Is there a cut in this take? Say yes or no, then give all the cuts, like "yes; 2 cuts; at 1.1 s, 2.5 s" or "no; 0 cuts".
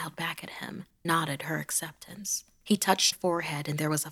yes; 2 cuts; at 1.0 s, 3.1 s